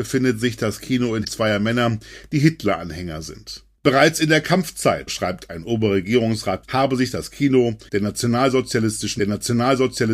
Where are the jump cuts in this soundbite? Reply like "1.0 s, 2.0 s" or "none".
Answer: 1.2 s, 5.1 s, 6.6 s, 7.9 s, 9.2 s